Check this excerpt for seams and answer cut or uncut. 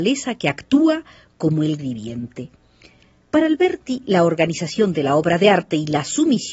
cut